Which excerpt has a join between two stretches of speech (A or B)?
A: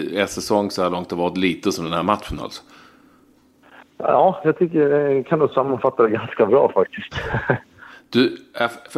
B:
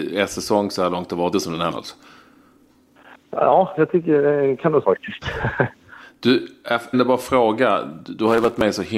B